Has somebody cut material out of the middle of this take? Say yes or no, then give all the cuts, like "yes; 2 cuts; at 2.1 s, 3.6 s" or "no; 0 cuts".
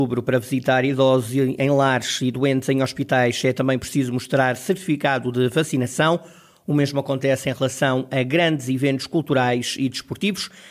no; 0 cuts